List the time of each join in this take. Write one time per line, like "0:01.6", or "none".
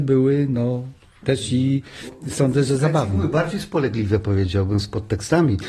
none